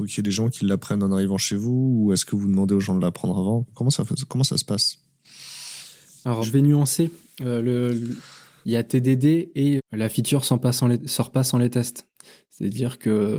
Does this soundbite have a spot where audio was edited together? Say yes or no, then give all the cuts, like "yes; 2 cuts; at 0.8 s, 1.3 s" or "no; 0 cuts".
yes; 3 cuts; at 3.6 s, 6.4 s, 9.8 s